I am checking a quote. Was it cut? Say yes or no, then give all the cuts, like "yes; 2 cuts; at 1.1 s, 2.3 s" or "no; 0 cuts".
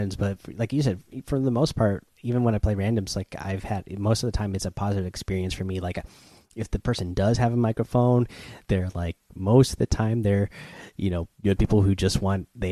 yes; 1 cut; at 11.3 s